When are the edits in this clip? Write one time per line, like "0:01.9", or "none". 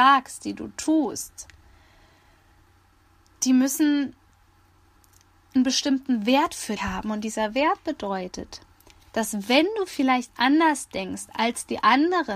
0:06.8